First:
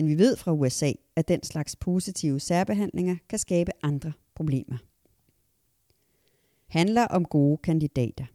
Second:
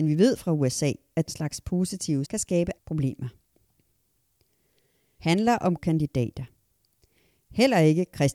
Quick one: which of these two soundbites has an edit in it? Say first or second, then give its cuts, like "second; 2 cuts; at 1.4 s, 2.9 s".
second; 4 cuts; at 1.3 s, 2.3 s, 2.8 s, 5.8 s